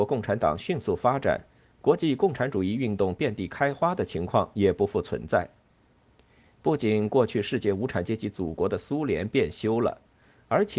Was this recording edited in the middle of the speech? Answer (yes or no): no